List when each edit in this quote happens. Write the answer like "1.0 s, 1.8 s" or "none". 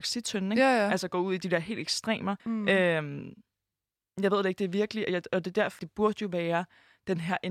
2.4 s, 5.8 s